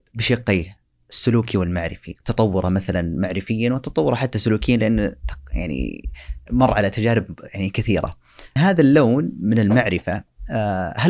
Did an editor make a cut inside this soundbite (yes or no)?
yes